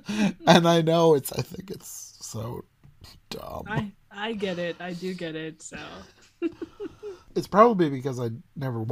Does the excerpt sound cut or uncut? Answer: cut